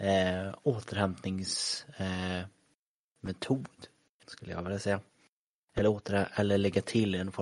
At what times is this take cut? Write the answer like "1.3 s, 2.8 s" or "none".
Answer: 4.2 s